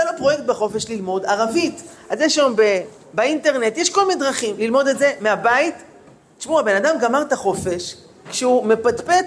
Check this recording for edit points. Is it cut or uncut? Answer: uncut